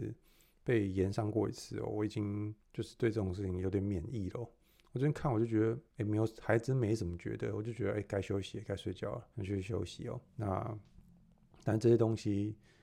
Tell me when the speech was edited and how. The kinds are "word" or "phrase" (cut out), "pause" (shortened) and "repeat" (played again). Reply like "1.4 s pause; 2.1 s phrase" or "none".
2.6 s pause; 5.9 s pause; 9.3 s pause; 10.3 s pause